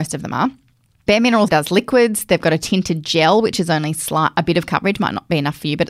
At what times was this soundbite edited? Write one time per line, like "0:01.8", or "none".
0:01.5